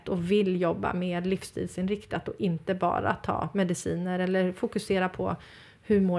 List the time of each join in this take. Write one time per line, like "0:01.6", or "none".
none